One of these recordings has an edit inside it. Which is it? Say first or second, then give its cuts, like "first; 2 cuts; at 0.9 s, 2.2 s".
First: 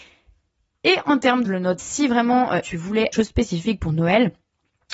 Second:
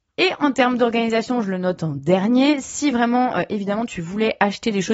first; 4 cuts; at 1.4 s, 1.8 s, 2.6 s, 3.1 s